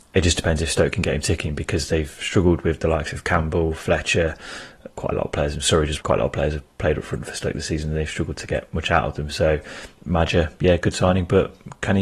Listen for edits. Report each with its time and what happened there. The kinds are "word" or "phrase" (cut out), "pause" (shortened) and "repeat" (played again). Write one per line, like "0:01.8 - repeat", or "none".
0:05.0 - word
0:06.0 - word
0:10.0 - pause